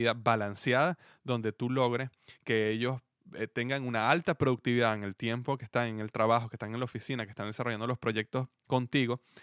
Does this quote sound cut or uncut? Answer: uncut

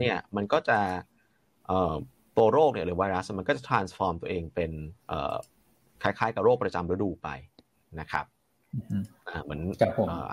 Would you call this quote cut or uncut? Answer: uncut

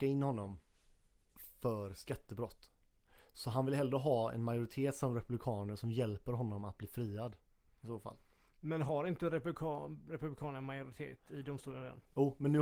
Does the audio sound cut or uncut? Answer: uncut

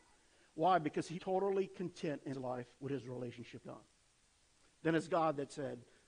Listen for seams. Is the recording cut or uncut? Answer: cut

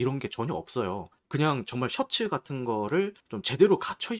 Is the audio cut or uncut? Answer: cut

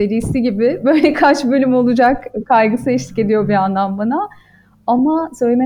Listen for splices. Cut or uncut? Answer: uncut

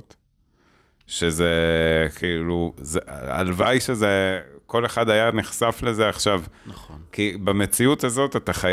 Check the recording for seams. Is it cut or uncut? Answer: uncut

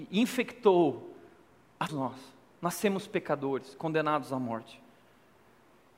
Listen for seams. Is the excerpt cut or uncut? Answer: cut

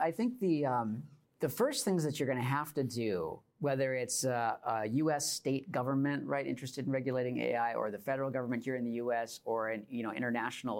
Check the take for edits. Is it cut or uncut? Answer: cut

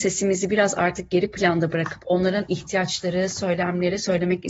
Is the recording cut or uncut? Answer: uncut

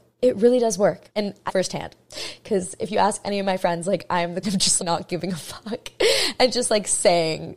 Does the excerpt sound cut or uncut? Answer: cut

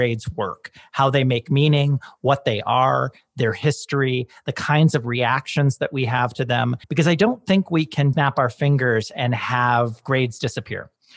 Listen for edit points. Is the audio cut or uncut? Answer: cut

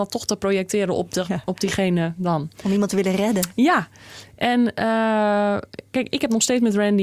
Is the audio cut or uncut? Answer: uncut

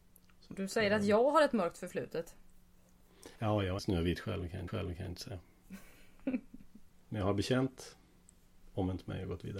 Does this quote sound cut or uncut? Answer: cut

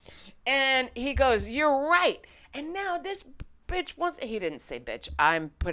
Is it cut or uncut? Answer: uncut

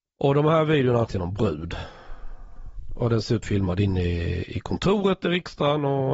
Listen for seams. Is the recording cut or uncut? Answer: cut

